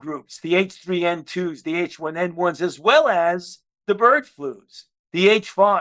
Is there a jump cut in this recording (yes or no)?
no